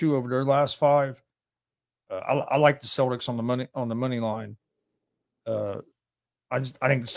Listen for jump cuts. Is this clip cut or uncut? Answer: uncut